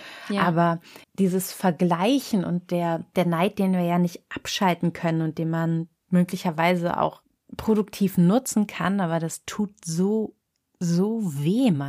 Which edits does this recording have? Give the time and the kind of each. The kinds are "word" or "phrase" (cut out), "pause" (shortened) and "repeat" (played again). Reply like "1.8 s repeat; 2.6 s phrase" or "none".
1.0 s pause